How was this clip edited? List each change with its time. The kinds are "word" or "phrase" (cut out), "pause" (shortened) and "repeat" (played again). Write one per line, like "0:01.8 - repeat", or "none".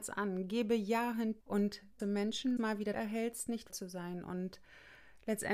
0:01.4 - word
0:02.0 - word
0:02.6 - phrase
0:02.9 - phrase
0:03.7 - word